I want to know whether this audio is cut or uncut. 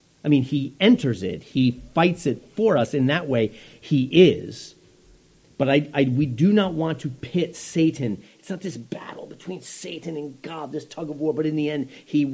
uncut